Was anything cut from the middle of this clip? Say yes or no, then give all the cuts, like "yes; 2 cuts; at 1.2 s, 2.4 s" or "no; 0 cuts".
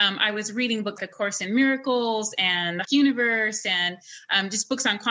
yes; 2 cuts; at 1.0 s, 2.8 s